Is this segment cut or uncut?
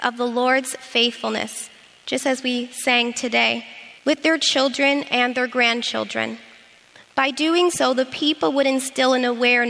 cut